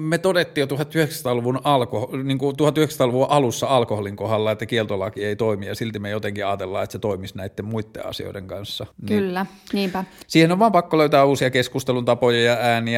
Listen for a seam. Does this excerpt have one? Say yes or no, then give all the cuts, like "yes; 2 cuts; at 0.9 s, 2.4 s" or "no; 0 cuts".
yes; 1 cut; at 8.9 s